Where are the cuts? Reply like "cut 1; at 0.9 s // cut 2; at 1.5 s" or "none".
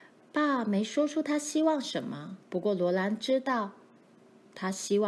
cut 1; at 2.4 s